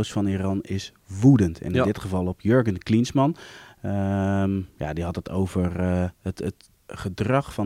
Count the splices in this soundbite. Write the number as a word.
one